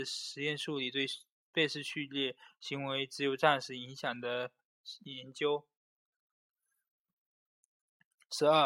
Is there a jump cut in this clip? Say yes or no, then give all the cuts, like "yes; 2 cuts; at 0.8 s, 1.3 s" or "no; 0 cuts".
no; 0 cuts